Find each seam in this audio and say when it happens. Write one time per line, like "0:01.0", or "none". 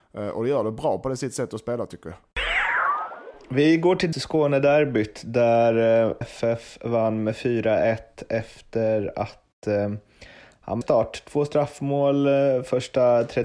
0:04.1
0:06.2
0:10.8